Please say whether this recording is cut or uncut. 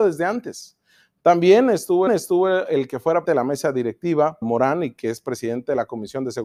cut